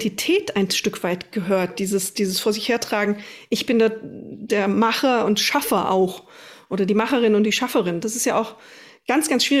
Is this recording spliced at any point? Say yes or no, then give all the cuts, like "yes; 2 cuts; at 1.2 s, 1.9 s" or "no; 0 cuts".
no; 0 cuts